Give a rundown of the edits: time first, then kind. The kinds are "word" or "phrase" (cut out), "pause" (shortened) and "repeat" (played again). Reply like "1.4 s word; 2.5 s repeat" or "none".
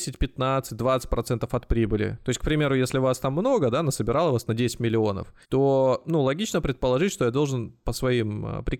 5.4 s pause